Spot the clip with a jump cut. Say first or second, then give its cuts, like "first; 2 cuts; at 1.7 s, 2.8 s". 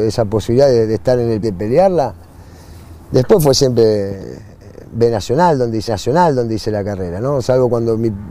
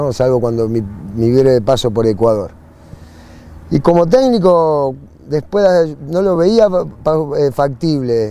first; 2 cuts; at 1.4 s, 5.9 s